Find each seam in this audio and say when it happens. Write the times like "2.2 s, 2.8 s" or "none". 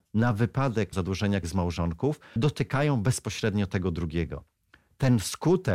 0.9 s, 1.4 s, 2.4 s